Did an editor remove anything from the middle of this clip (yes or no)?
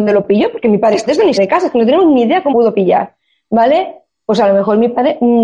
yes